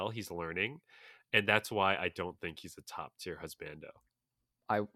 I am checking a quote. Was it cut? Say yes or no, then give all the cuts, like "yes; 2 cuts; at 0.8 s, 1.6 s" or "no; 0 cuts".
no; 0 cuts